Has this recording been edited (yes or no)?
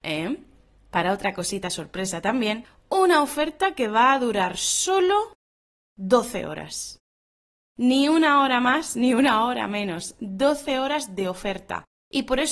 no